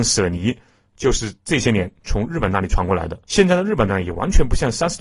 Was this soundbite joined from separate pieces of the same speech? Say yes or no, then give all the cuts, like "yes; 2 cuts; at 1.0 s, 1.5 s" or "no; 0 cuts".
yes; 2 cuts; at 1.4 s, 3.2 s